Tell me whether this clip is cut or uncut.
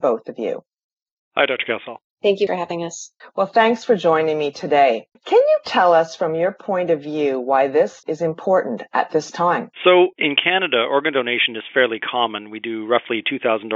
cut